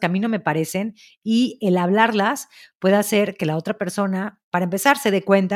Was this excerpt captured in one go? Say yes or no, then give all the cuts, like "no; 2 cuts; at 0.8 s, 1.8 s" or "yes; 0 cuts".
yes; 0 cuts